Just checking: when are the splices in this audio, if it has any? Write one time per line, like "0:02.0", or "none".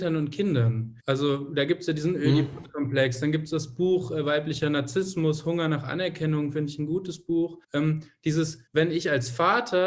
0:01.0
0:07.6
0:08.7